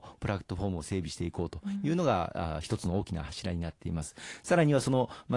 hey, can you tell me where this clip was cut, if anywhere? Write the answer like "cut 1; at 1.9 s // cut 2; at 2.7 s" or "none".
none